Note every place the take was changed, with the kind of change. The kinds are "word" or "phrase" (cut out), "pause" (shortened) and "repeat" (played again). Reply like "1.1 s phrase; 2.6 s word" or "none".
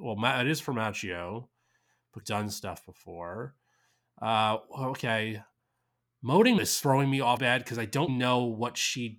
2.2 s word; 6.6 s word; 7.4 s word; 8.1 s word

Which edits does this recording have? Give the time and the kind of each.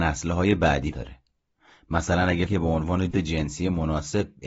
0.9 s word; 2.5 s word; 3.1 s word

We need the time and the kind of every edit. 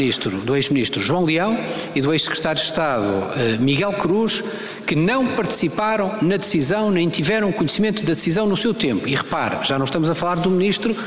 none

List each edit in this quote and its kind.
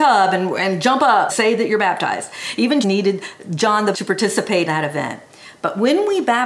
1.3 s word; 2.8 s word; 3.9 s word; 4.7 s word

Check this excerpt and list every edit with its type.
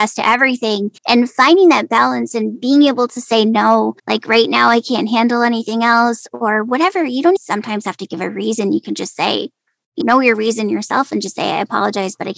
1.0 s pause; 4.0 s pause; 7.4 s word; 10.0 s word

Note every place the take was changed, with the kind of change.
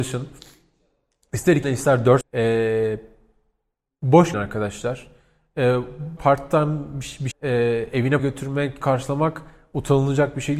1.6 s word; 2.2 s word; 4.3 s word; 6.2 s word; 7.3 s word; 8.2 s word; 8.8 s word

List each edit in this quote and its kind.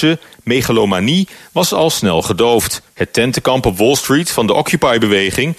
2.9 s pause

